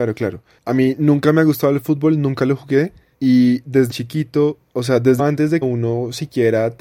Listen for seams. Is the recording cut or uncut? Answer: cut